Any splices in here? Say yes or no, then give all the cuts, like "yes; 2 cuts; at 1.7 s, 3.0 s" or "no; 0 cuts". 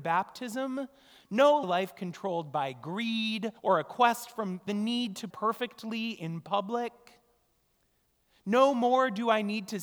yes; 4 cuts; at 1.6 s, 3.6 s, 4.7 s, 5.3 s